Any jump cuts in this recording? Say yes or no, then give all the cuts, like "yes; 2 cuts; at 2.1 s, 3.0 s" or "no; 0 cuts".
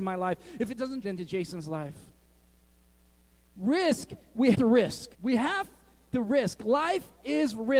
yes; 3 cuts; at 1.0 s, 4.5 s, 5.1 s